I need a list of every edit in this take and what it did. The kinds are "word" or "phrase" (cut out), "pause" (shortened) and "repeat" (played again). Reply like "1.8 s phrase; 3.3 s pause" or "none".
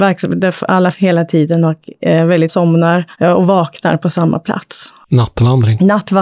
0.9 s phrase; 2.5 s word